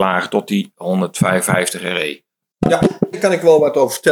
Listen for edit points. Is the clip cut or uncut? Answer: cut